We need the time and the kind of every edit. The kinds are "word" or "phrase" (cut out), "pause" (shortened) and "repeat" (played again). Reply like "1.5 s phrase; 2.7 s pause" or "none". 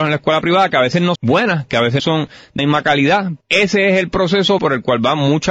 1.1 s word; 2.0 s word; 2.6 s word; 3.4 s word; 4.6 s word